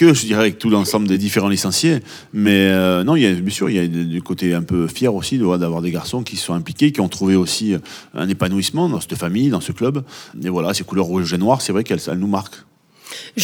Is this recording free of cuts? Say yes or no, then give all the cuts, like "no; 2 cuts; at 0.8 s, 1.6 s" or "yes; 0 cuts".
yes; 0 cuts